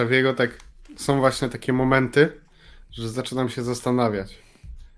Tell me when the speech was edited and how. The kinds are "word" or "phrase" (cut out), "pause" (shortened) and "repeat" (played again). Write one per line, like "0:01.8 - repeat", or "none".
none